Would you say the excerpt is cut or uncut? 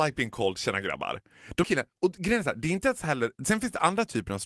cut